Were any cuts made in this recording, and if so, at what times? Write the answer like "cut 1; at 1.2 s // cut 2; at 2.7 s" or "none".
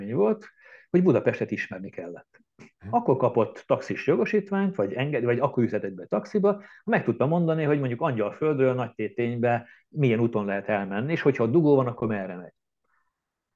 none